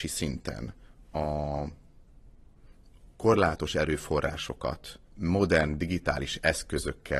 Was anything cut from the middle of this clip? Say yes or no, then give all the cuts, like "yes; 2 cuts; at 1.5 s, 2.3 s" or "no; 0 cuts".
yes; 2 cuts; at 3.1 s, 5.0 s